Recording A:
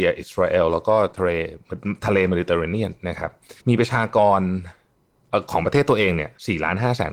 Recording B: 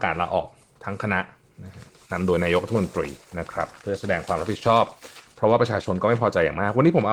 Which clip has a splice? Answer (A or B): A